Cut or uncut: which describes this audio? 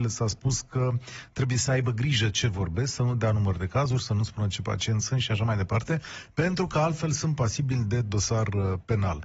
uncut